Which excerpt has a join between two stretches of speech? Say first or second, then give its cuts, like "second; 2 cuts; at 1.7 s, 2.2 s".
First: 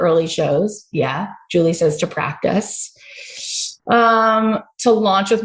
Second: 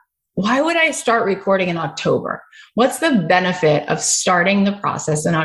first; 1 cut; at 3.8 s